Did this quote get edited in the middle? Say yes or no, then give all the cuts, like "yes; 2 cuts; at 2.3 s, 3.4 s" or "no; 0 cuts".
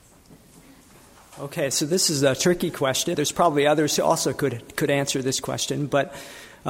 yes; 1 cut; at 3.1 s